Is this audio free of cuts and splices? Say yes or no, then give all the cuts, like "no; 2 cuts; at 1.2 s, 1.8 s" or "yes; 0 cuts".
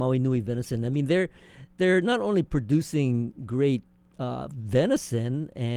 yes; 0 cuts